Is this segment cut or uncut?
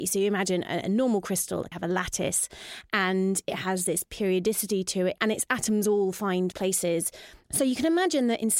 cut